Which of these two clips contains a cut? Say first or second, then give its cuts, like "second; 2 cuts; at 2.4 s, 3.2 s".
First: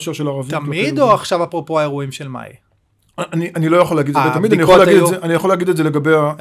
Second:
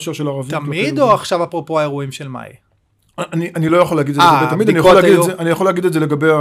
first; 1 cut; at 4.1 s